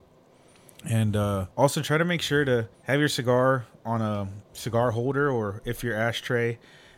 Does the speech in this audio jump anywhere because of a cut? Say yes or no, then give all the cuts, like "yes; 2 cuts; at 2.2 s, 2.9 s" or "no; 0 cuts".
yes; 2 cuts; at 1.5 s, 2.7 s